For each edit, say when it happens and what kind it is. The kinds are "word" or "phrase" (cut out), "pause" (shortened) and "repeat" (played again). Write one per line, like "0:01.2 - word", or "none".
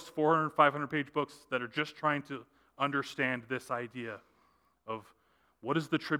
none